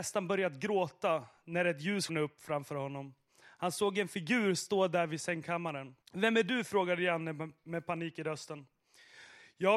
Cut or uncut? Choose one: cut